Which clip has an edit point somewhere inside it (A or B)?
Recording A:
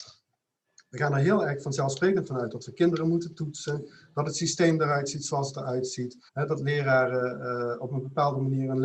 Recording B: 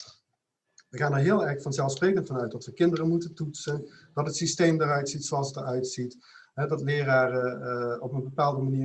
A